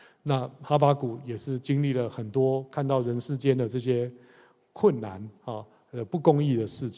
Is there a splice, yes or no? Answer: no